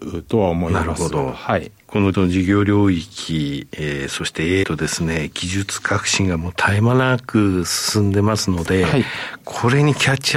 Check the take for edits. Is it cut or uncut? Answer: cut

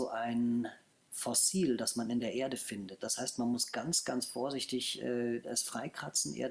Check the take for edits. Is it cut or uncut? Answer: uncut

